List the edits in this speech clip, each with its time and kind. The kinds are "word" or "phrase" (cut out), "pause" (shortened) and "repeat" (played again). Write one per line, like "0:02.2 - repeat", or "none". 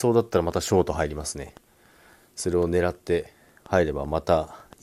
none